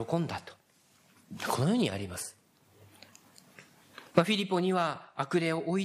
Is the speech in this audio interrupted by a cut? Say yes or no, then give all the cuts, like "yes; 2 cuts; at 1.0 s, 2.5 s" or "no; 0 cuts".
yes; 1 cut; at 4.1 s